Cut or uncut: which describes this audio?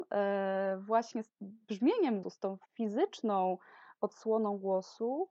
cut